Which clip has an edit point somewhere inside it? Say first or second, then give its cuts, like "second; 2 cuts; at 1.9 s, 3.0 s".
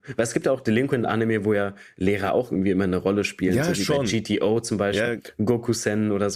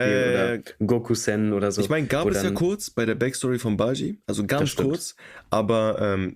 first; 1 cut; at 5.1 s